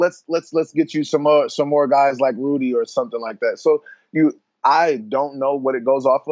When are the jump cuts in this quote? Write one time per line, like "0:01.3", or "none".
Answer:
none